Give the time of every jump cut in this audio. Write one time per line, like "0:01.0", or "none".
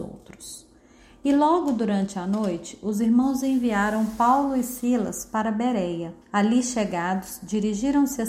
0:06.2